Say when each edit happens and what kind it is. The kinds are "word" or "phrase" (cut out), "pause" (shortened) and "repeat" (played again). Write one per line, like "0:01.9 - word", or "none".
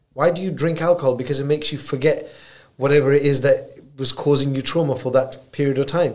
none